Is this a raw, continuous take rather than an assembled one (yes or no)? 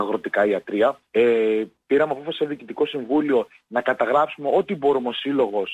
no